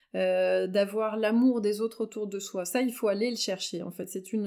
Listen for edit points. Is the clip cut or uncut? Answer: uncut